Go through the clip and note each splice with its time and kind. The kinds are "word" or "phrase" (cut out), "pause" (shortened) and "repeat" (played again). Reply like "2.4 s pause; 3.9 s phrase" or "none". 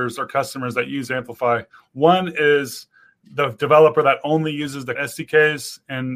5.0 s word